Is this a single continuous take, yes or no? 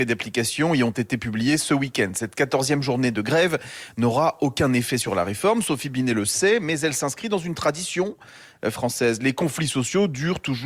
yes